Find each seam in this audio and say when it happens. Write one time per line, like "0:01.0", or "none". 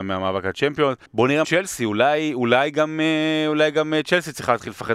0:01.1
0:01.4